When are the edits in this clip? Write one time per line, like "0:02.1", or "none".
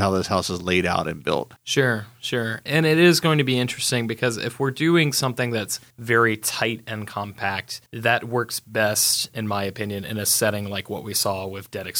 0:01.6
0:05.9
0:07.9